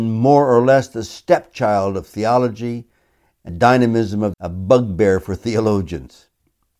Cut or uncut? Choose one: cut